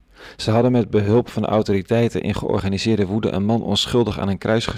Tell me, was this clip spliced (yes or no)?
no